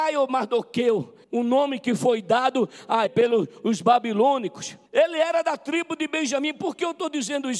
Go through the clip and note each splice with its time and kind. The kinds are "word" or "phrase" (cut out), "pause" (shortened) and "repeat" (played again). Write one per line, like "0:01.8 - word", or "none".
0:01.2 - pause
0:03.1 - word
0:04.9 - pause